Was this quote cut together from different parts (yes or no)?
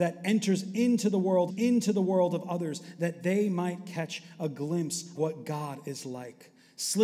yes